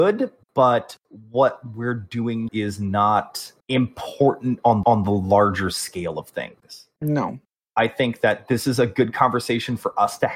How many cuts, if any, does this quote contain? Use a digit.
4